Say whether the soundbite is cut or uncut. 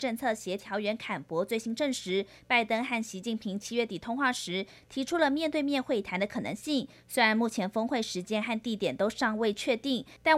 uncut